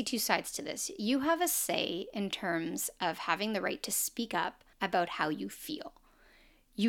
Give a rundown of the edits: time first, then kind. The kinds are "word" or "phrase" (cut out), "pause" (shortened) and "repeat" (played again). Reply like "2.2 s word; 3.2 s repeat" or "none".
4.7 s pause